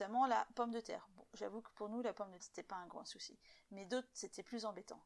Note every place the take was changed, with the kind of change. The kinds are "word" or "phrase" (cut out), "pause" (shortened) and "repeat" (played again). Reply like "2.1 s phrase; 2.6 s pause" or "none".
1.3 s pause; 2.4 s word